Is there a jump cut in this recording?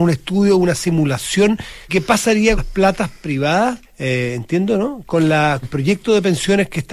yes; 4 cuts; at 1.9 s, 2.6 s, 3.8 s, 5.6 s

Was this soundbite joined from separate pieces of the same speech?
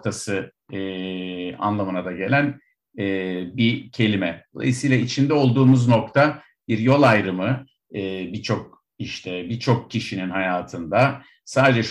no; 0 cuts

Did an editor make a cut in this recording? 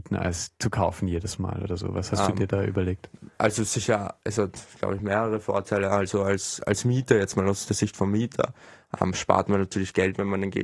no; 0 cuts

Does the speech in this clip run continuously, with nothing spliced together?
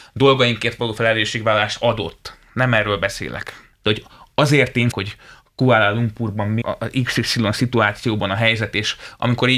no; 3 cuts; at 3.7 s, 4.9 s, 6.6 s

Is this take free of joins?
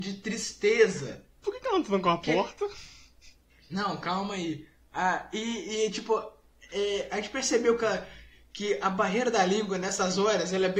yes; 0 cuts

